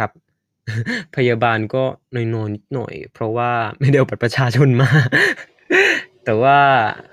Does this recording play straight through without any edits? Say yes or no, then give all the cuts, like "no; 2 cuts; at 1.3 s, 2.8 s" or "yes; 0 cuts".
yes; 0 cuts